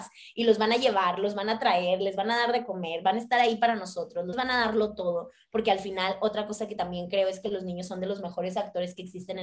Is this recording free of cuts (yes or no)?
no